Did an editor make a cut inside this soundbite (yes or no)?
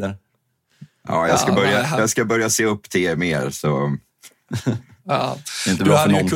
no